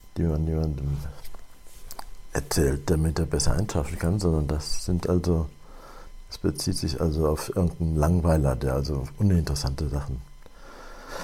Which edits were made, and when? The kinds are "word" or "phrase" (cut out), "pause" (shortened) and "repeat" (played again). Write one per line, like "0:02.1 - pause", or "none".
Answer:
none